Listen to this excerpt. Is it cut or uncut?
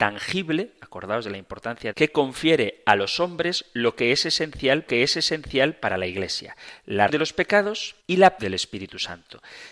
cut